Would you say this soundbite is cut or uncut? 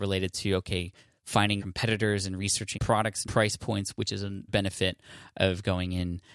cut